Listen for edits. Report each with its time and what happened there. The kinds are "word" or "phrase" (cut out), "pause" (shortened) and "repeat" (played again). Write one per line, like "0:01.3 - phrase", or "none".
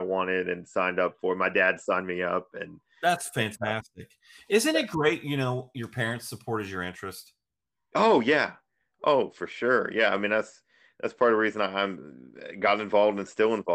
none